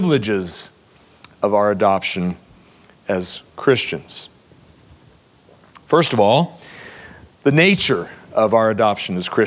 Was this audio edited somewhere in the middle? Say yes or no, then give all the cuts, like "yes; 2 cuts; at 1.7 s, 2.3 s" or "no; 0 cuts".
no; 0 cuts